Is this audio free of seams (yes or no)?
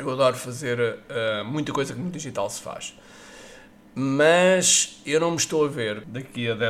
yes